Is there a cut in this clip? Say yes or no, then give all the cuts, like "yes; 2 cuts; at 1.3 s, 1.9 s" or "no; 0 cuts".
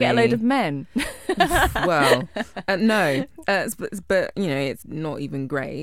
yes; 1 cut; at 4.8 s